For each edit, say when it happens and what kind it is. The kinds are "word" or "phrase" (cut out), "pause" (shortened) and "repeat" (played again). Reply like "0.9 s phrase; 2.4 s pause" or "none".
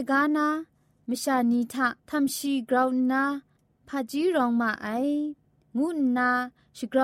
2.0 s pause

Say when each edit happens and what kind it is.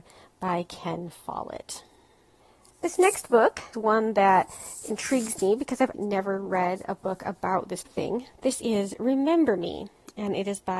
2.4 s pause; 3.7 s word; 5.9 s word; 7.9 s word

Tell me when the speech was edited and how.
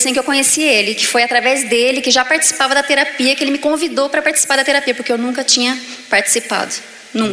none

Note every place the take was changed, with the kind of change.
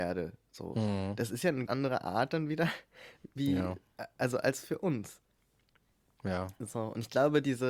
1.7 s word

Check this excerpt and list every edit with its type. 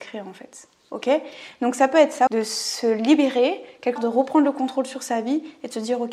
2.3 s word; 4.0 s word

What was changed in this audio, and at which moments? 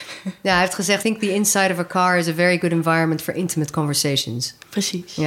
1.0 s word

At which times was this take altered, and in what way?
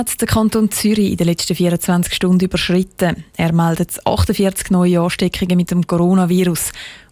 none

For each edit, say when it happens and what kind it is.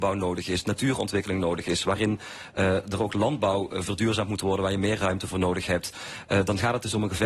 none

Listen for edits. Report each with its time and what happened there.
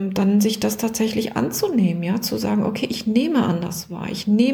none

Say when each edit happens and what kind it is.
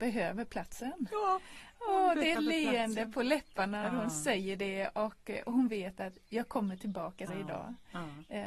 2.3 s word; 3.8 s word; 7.3 s word

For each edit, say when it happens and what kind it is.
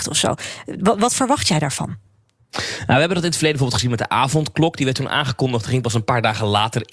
none

